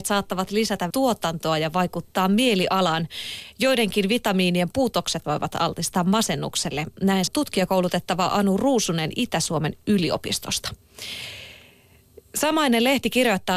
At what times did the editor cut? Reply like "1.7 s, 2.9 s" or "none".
0.9 s, 5.2 s, 7.3 s